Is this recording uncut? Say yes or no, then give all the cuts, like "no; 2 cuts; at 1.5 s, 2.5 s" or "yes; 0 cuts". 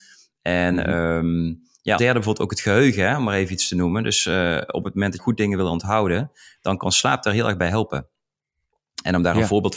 no; 2 cuts; at 2.0 s, 5.2 s